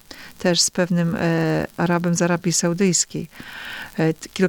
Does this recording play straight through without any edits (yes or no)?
yes